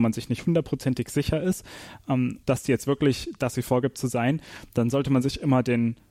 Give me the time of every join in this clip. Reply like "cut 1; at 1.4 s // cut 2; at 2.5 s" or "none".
cut 1; at 2.4 s // cut 2; at 3.5 s